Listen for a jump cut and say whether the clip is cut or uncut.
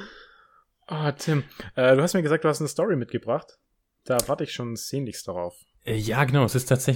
uncut